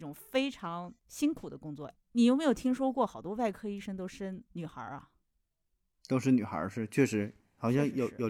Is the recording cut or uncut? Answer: cut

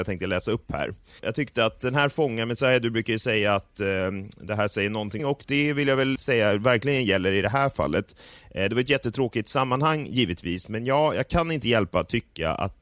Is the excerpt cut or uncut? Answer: cut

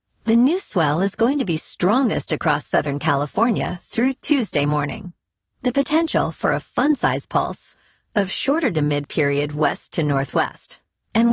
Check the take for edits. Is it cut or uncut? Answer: uncut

